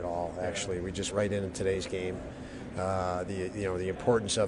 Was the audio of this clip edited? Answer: yes; 1 cut; at 1.1 s

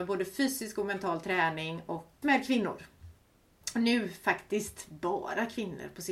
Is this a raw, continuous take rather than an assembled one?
no; 1 cut; at 2.2 s

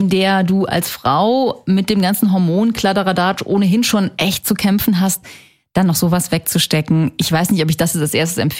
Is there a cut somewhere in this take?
no; 0 cuts

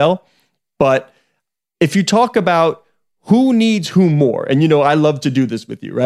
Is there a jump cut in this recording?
no; 0 cuts

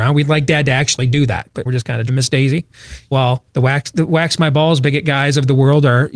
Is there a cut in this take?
yes; 4 cuts; at 1.7 s, 2.1 s, 3.1 s, 3.5 s

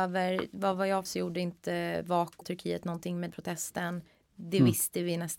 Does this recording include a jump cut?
yes; 3 cuts; at 1.1 s, 2.4 s, 3.3 s

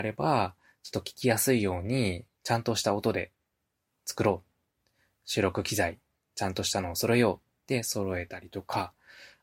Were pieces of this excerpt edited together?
no; 0 cuts

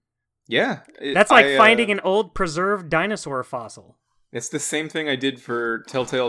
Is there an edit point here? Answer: no; 0 cuts

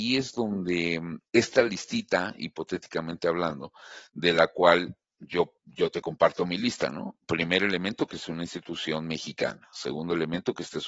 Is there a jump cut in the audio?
yes; 3 cuts; at 1.3 s, 5.6 s, 7.2 s

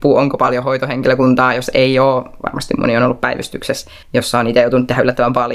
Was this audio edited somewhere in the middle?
yes; 1 cut; at 4.0 s

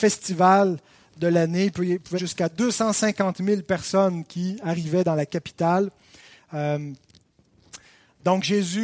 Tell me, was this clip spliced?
yes; 1 cut; at 2.2 s

